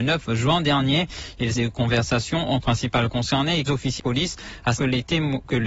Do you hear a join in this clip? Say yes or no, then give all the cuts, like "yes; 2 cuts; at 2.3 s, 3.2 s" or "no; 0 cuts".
yes; 5 cuts; at 1.6 s, 2.6 s, 3.7 s, 4.0 s, 4.8 s